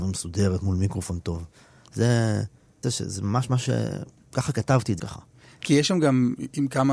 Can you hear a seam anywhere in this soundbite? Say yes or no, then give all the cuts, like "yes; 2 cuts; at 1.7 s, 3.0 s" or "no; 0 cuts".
yes; 2 cuts; at 2.8 s, 5.0 s